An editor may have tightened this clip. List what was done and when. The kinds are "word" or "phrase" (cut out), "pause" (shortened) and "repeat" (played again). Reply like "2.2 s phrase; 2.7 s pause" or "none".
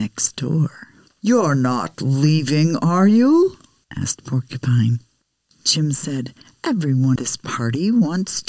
7.2 s word